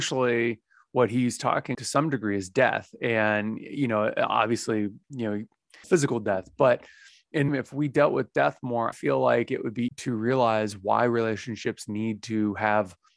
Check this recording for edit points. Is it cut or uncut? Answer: cut